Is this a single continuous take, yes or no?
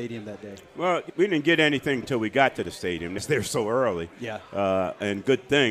no